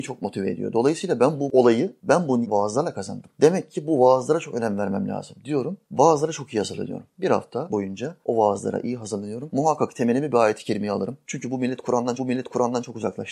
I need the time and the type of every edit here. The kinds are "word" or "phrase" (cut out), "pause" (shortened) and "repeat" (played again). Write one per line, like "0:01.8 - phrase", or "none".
0:02.4 - word
0:12.2 - repeat